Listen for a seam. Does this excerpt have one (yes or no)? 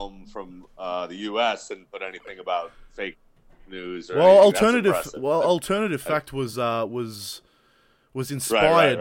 no